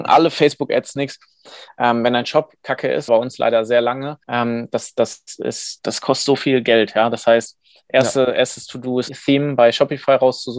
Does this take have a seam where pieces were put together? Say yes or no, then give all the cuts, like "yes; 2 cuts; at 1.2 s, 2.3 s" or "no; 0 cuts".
yes; 4 cuts; at 3.1 s, 4.2 s, 5.8 s, 9.1 s